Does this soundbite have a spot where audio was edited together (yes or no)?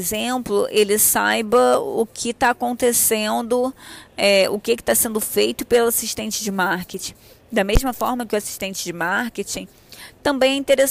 no